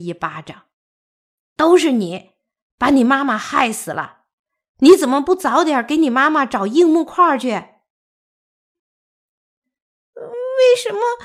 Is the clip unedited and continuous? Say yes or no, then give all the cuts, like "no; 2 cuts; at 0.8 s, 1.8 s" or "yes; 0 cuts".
yes; 0 cuts